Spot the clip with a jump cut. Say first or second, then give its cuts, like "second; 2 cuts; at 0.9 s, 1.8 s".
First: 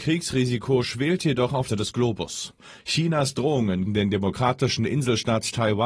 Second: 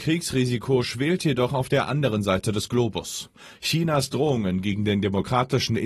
first; 2 cuts; at 1.7 s, 3.9 s